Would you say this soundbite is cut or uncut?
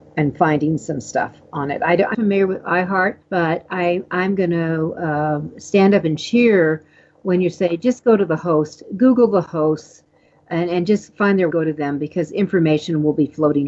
cut